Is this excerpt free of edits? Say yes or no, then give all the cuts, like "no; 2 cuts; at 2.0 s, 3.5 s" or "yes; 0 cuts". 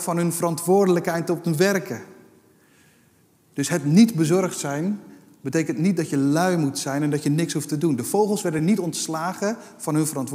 yes; 0 cuts